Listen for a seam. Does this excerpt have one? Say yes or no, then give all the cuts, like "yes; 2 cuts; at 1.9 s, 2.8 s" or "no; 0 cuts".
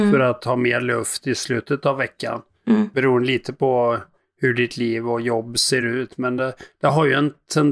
no; 0 cuts